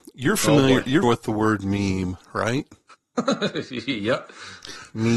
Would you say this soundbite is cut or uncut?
cut